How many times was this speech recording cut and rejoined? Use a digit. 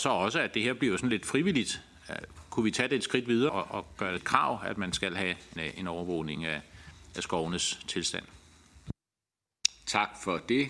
3